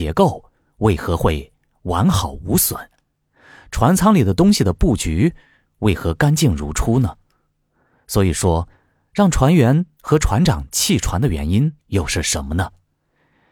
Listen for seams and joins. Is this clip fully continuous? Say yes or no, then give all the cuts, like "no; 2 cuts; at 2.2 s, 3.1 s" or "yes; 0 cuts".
no; 1 cut; at 11.8 s